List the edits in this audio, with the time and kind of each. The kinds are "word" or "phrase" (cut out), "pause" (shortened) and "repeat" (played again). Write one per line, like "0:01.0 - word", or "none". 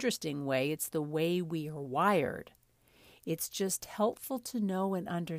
none